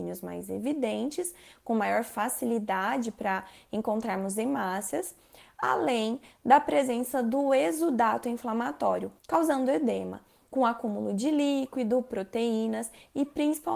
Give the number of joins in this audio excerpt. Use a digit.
1